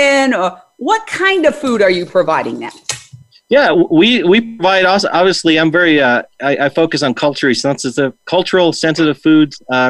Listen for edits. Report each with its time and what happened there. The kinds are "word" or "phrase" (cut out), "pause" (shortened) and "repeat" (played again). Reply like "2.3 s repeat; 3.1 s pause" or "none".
none